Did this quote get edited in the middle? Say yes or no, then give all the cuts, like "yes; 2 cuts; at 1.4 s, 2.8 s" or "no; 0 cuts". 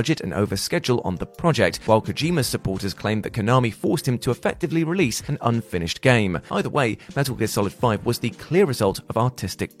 no; 0 cuts